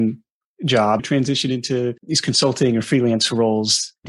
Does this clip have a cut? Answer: yes; 2 cuts; at 1.0 s, 2.0 s

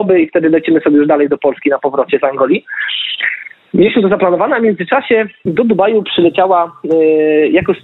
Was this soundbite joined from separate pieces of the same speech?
no; 0 cuts

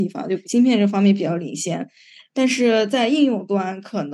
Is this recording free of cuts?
yes; 0 cuts

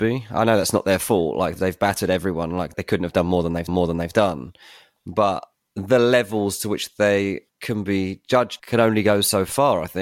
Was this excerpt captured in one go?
no; 6 cuts; at 1.6 s, 2.7 s, 3.7 s, 5.5 s, 7.5 s, 8.6 s

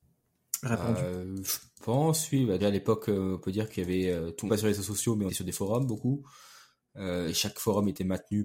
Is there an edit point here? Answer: yes; 3 cuts; at 2.6 s, 4.5 s, 5.3 s

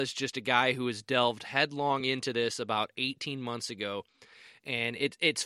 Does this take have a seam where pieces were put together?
no; 0 cuts

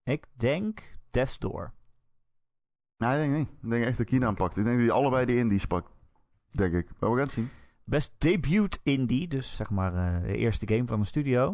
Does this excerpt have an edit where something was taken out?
yes; 1 cut; at 9.5 s

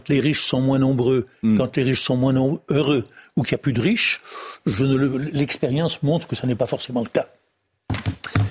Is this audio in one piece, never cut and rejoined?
yes; 0 cuts

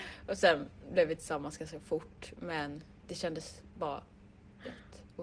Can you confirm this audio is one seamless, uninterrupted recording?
yes; 0 cuts

